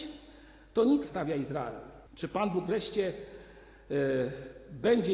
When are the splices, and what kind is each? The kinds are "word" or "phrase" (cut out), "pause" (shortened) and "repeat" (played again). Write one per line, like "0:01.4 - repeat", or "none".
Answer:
0:01.0 - phrase
0:02.1 - pause